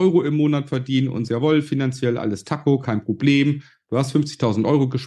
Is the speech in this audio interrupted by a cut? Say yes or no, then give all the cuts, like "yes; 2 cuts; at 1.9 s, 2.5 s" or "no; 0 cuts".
yes; 1 cut; at 1.3 s